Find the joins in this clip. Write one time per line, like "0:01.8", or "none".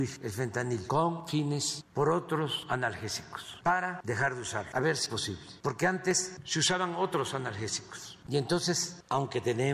0:01.9
0:05.1